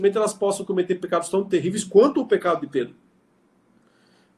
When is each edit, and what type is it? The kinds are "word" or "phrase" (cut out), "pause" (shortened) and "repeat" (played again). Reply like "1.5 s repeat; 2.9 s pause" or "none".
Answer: none